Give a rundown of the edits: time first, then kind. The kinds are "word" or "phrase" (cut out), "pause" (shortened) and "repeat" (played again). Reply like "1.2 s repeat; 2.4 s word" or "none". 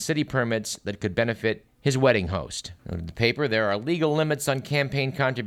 1.7 s pause; 2.8 s pause